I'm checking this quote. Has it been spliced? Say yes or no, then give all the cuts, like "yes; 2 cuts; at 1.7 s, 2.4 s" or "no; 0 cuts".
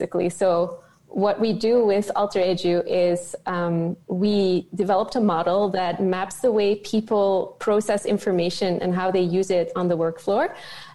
yes; 1 cut; at 4.0 s